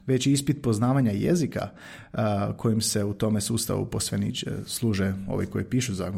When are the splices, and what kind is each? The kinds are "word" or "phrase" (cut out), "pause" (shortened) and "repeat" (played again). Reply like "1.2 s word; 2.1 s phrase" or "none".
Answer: none